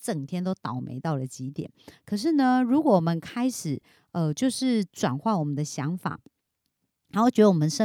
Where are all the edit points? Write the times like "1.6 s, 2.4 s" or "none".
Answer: none